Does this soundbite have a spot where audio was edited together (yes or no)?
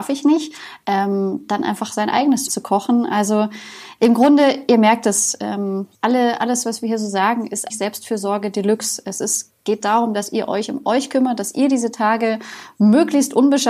yes